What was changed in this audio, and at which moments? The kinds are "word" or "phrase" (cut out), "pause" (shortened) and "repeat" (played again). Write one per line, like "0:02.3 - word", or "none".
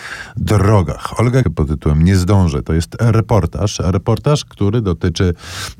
0:01.4 - phrase